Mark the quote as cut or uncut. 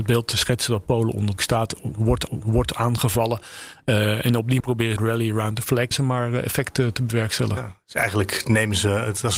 cut